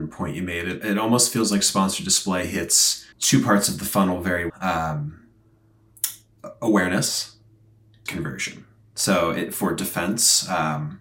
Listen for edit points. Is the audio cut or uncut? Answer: cut